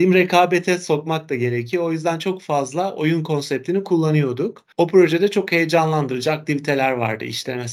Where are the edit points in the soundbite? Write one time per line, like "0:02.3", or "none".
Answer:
0:04.7

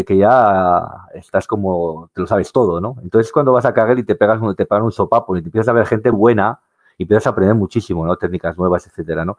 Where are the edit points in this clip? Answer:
0:06.1

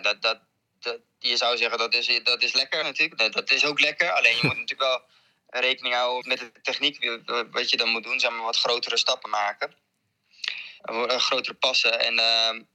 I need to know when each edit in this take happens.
0:02.8
0:06.2
0:09.2
0:10.8

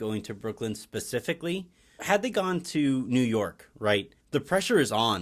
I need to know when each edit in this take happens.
0:02.0
0:04.2

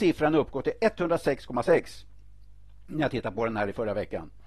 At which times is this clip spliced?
none

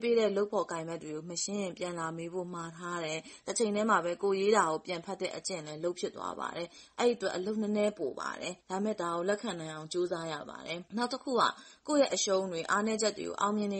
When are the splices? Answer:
0:08.6
0:10.9

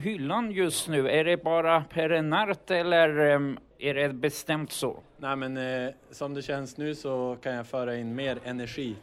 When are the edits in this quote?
none

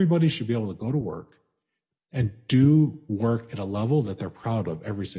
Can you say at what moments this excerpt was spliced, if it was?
none

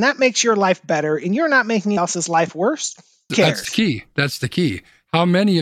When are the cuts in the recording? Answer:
0:02.0
0:03.3

